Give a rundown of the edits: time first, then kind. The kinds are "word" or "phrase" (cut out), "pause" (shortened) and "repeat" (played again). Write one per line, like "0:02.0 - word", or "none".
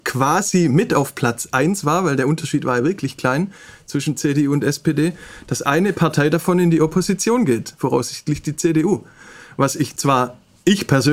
none